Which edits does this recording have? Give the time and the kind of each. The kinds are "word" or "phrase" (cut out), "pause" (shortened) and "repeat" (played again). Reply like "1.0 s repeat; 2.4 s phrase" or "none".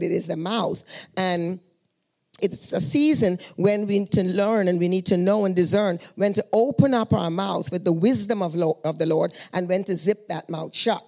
2.4 s word; 4.1 s word